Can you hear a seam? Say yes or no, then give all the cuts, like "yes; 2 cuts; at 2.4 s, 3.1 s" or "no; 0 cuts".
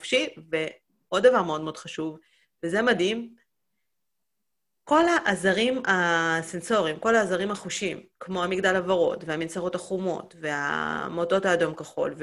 no; 0 cuts